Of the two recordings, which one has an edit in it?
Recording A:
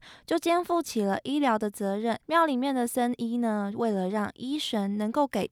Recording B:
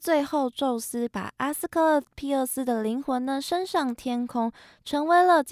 A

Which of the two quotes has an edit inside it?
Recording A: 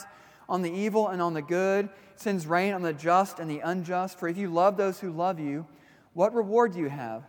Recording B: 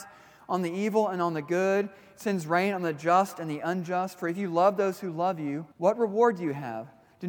B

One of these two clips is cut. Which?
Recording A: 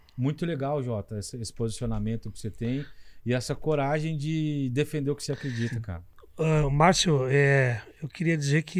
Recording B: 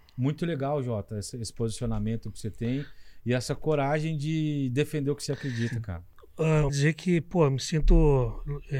B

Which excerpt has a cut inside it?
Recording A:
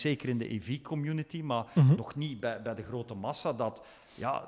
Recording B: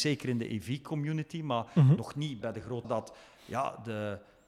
B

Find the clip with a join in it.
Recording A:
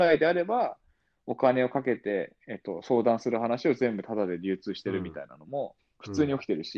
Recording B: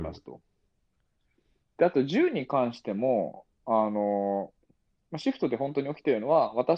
A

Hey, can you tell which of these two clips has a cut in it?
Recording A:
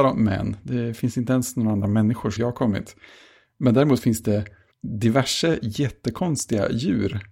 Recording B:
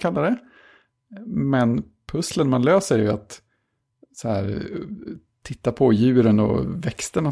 A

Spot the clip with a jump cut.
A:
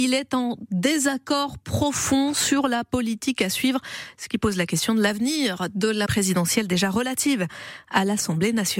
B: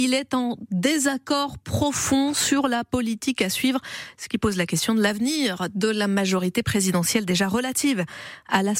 A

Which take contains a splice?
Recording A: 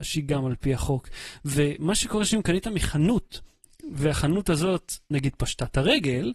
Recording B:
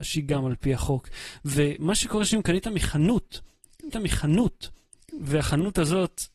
B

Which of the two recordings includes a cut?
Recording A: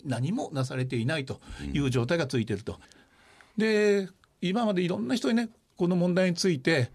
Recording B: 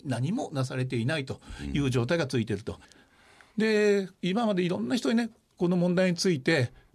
B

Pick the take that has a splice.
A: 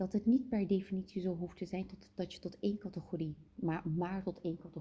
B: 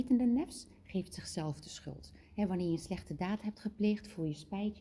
A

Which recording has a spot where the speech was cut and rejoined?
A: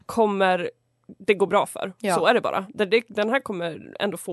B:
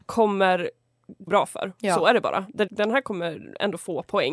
B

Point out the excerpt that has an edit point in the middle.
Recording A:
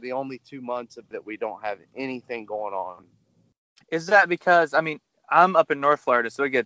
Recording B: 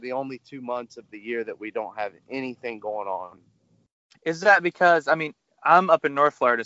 A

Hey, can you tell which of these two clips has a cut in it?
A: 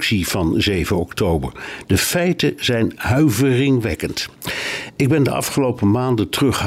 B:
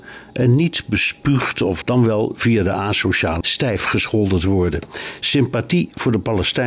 B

